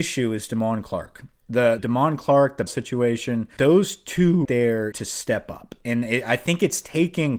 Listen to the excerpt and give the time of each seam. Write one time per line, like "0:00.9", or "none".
0:01.8
0:02.7
0:03.6
0:04.4
0:04.9

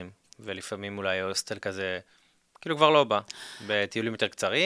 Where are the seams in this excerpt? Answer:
none

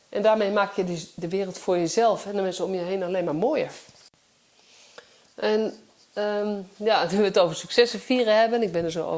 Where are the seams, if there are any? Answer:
none

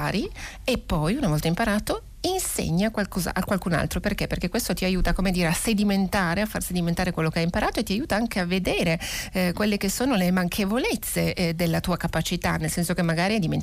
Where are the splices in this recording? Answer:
none

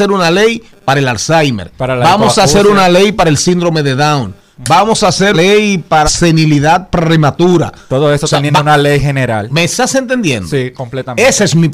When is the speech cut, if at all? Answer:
0:05.3
0:06.0

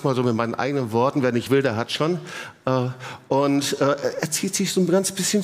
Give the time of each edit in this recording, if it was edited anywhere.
none

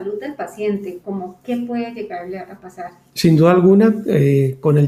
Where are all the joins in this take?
none

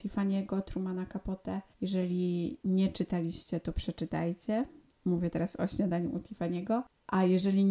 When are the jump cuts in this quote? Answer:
0:01.7

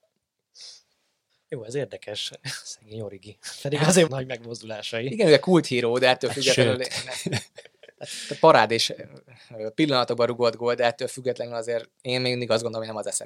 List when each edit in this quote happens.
0:01.3
0:04.1

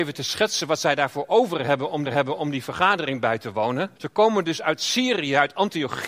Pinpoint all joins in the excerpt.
0:02.0
0:04.0

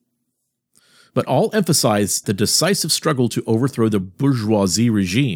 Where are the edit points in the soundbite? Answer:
0:02.2

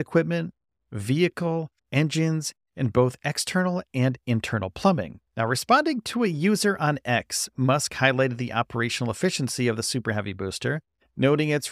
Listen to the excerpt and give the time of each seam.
0:01.8
0:05.3

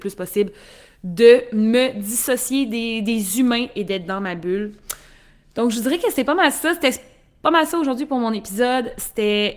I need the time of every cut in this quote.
none

